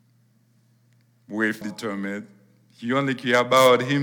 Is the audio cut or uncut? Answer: cut